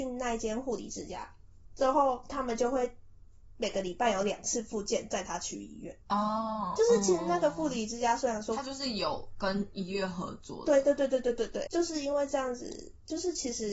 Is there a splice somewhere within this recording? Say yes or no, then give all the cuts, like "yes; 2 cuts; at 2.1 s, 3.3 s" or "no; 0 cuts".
yes; 2 cuts; at 6.0 s, 11.7 s